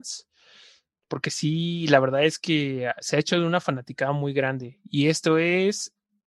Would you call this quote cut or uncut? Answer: uncut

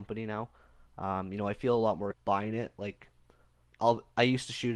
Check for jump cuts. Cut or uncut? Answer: cut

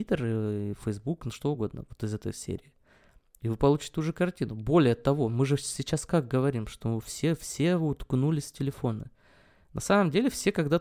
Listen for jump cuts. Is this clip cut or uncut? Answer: uncut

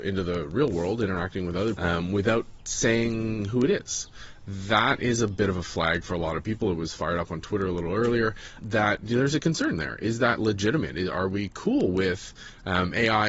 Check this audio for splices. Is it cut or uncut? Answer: cut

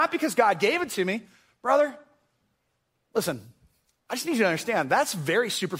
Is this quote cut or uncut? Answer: uncut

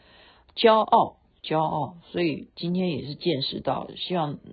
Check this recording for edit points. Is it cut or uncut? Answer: uncut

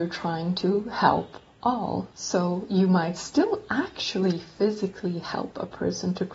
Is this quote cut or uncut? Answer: cut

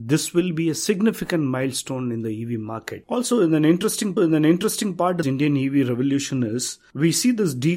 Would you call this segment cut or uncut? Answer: cut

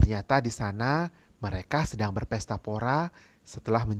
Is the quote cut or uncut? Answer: uncut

